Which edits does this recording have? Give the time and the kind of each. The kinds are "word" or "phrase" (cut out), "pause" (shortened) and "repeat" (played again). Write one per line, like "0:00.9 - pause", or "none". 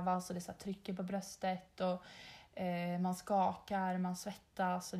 none